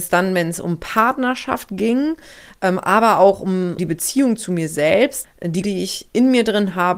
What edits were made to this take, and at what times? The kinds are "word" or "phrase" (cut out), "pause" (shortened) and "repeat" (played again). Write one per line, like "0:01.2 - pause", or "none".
0:03.8 - word
0:05.2 - word
0:05.6 - word